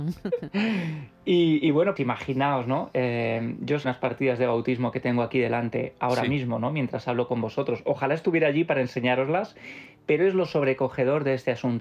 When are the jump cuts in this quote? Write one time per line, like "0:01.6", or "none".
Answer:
0:02.0
0:03.8